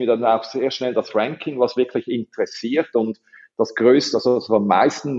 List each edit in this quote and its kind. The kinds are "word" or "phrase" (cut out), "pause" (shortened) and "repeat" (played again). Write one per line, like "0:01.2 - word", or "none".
none